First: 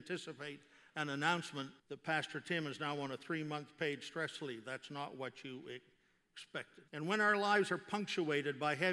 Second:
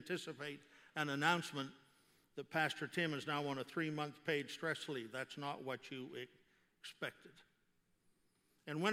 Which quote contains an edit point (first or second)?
first